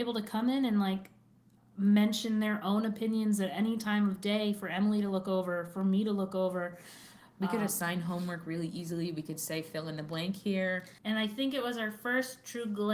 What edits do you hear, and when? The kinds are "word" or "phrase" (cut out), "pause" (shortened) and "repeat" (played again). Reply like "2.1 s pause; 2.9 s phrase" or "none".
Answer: 11.0 s pause